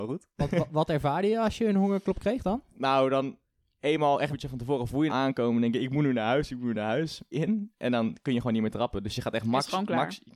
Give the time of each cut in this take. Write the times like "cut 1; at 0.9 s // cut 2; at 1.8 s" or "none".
cut 1; at 4.3 s // cut 2; at 5.1 s // cut 3; at 7.3 s

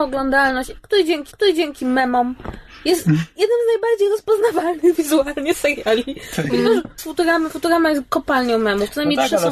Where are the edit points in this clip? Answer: cut 1; at 1.3 s // cut 2; at 7.0 s

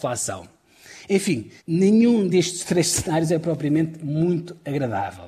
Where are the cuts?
cut 1; at 1.6 s

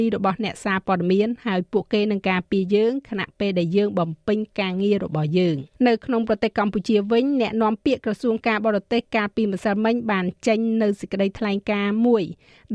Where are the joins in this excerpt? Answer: cut 1; at 5.7 s

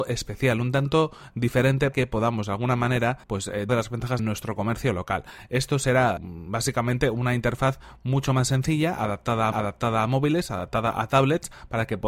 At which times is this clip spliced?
cut 1; at 1.9 s // cut 2; at 3.2 s // cut 3; at 3.7 s // cut 4; at 4.2 s // cut 5; at 6.2 s // cut 6; at 9.5 s

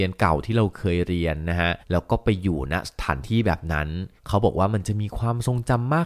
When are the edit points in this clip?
cut 1; at 1.8 s // cut 2; at 4.2 s

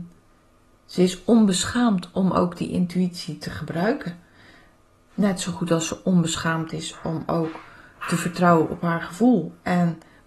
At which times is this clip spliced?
none

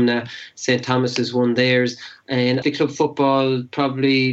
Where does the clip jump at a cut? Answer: cut 1; at 2.6 s

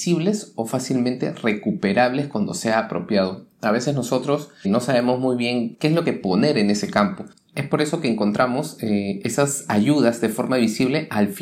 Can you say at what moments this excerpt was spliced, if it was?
cut 1; at 4.6 s // cut 2; at 5.7 s // cut 3; at 6.0 s

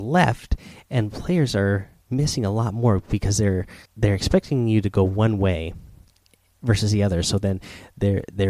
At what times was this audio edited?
cut 1; at 3.8 s

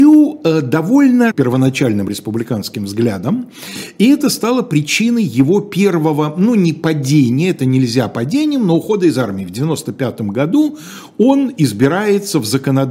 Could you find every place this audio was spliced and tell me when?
cut 1; at 1.3 s

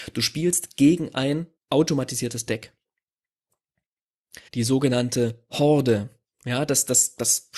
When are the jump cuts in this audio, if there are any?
cut 1; at 1.6 s // cut 2; at 4.5 s

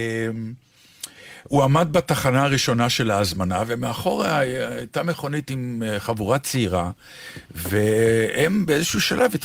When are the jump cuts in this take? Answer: none

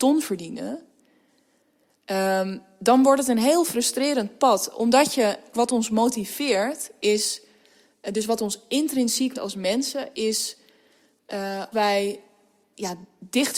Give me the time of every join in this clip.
cut 1; at 5.5 s // cut 2; at 9.3 s // cut 3; at 11.7 s

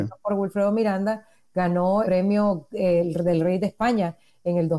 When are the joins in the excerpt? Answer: cut 1; at 2.0 s

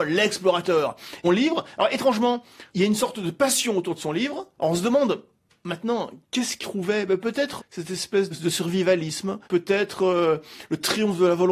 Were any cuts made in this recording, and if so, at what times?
cut 1; at 1.2 s // cut 2; at 2.7 s // cut 3; at 4.5 s // cut 4; at 6.2 s // cut 5; at 6.6 s // cut 6; at 7.6 s // cut 7; at 8.3 s // cut 8; at 9.4 s

